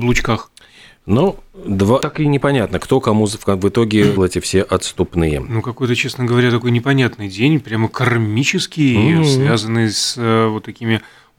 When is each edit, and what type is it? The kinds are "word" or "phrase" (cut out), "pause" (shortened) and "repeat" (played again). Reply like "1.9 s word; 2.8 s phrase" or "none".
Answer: 2.0 s word; 4.2 s word